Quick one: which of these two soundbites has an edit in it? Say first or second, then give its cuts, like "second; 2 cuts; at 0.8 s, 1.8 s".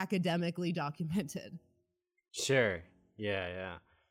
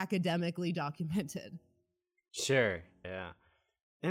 second; 1 cut; at 3.0 s